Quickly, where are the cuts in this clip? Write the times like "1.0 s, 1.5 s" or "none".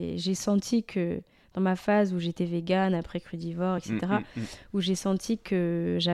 none